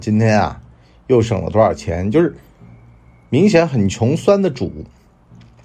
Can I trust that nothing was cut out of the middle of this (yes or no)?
yes